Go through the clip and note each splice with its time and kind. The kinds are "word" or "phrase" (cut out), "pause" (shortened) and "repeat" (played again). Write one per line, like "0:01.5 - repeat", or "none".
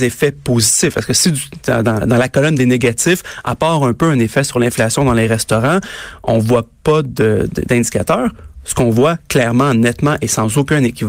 none